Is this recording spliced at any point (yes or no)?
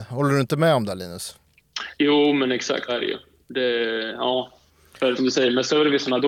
yes